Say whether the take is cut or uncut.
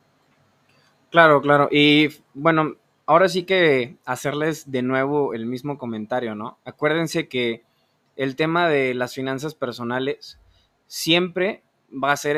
uncut